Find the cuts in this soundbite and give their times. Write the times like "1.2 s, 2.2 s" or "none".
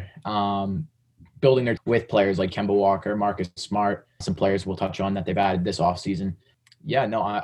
1.8 s, 2.5 s, 4.2 s

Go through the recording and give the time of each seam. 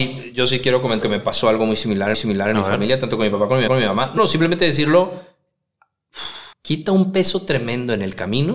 1.0 s, 2.1 s, 3.7 s, 4.2 s, 6.5 s

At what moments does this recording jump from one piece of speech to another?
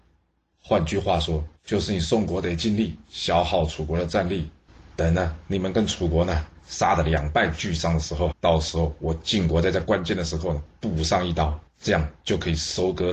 1.6 s, 8.3 s, 11.7 s

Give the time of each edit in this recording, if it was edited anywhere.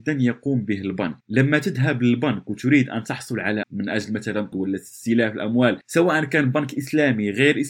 1.2 s, 3.6 s, 4.5 s

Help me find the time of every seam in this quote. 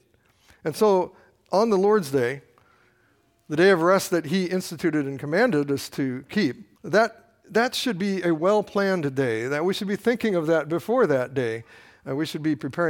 6.8 s

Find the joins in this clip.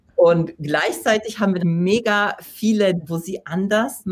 1.6 s, 3.0 s

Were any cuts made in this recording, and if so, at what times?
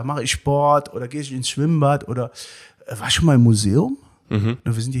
none

